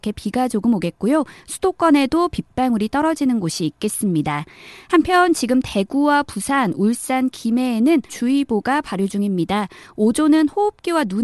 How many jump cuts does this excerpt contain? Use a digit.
1